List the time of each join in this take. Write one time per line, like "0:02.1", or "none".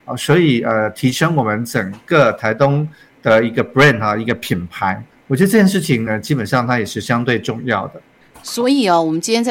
none